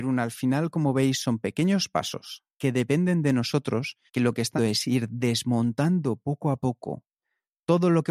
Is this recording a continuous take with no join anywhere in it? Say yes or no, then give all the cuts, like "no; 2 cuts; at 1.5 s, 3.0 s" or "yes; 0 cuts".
no; 3 cuts; at 2.5 s, 4.1 s, 4.6 s